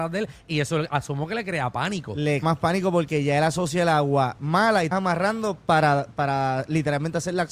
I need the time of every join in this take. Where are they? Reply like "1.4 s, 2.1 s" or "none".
2.4 s, 4.9 s, 6.1 s